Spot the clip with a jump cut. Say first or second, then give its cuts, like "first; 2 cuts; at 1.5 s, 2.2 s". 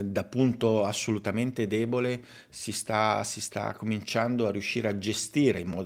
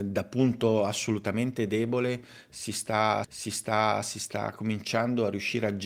second; 1 cut; at 3.2 s